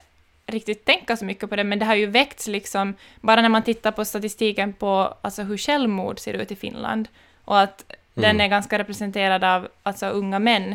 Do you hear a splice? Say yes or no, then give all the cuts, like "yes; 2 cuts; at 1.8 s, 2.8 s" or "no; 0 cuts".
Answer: no; 0 cuts